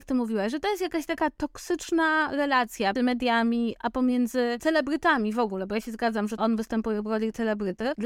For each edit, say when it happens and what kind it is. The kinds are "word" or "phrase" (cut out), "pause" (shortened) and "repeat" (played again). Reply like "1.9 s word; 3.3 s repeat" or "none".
3.0 s word; 6.4 s word